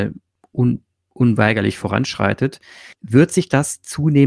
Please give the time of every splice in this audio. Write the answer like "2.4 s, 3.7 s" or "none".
2.9 s